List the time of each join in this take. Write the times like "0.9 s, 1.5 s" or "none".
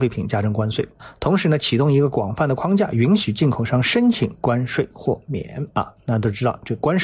5.7 s